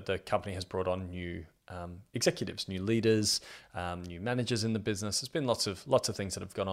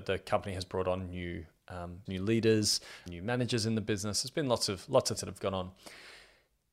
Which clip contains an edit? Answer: second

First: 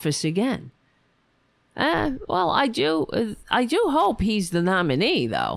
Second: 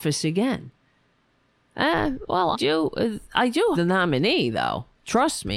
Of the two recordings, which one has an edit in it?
second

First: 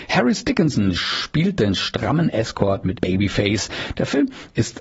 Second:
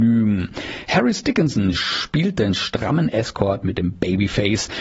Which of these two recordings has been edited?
first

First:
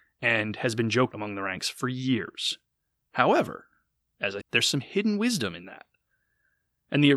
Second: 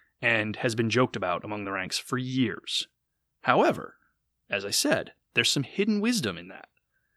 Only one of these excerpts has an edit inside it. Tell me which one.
first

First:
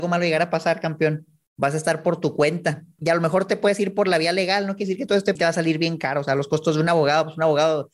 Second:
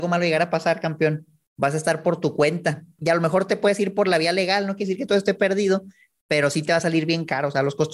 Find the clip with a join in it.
first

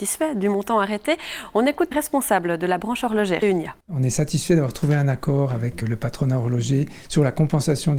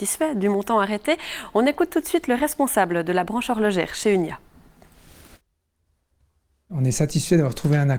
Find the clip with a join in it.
first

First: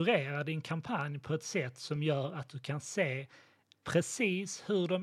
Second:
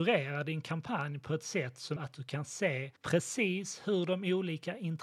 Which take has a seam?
second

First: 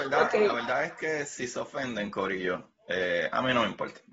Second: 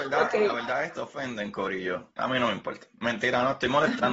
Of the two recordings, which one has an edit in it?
second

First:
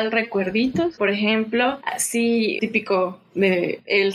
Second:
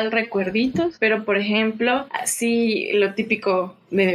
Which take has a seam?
first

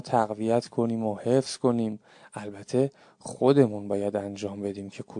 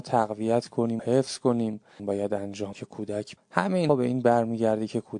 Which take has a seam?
second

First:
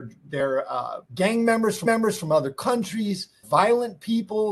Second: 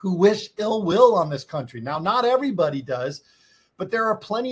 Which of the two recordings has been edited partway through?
first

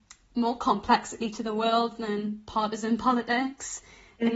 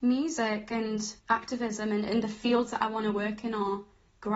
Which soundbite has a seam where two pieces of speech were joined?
second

